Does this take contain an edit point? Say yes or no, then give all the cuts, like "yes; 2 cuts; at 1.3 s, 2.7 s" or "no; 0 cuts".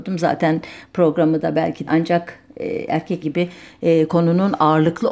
yes; 2 cuts; at 1.9 s, 3.2 s